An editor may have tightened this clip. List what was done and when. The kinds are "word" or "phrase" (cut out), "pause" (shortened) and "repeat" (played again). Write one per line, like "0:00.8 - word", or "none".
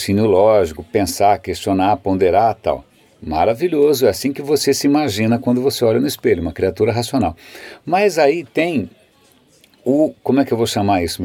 none